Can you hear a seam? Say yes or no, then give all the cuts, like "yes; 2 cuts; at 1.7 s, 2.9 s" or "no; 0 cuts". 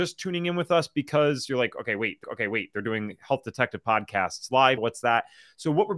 yes; 2 cuts; at 2.2 s, 4.8 s